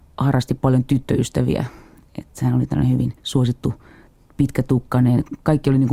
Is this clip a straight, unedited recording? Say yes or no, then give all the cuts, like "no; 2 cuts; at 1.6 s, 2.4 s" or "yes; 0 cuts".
no; 1 cut; at 3.2 s